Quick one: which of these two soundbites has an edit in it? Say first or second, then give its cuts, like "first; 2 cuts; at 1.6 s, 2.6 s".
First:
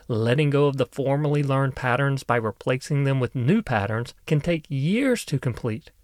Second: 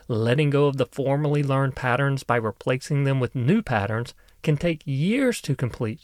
first; 1 cut; at 4.2 s